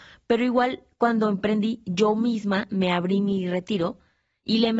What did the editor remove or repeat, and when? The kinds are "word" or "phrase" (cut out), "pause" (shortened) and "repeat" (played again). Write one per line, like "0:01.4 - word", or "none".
none